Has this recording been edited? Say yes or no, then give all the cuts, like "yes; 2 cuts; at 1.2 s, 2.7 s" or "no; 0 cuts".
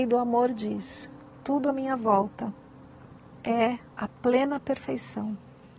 no; 0 cuts